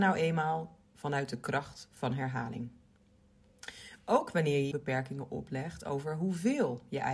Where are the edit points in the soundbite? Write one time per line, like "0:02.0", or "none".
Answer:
0:04.7